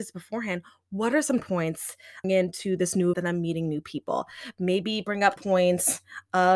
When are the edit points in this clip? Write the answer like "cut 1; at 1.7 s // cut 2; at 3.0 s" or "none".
cut 1; at 1.4 s // cut 2; at 2.2 s // cut 3; at 3.1 s // cut 4; at 5.4 s